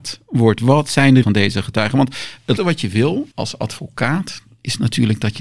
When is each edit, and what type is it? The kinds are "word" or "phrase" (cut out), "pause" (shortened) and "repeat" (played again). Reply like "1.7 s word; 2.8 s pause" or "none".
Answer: 1.2 s word; 2.6 s word; 3.3 s pause